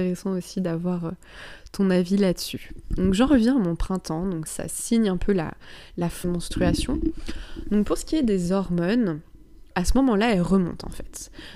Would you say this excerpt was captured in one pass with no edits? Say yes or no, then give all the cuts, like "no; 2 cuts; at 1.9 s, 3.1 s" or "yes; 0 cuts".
no; 3 cuts; at 4.5 s, 6.2 s, 9.7 s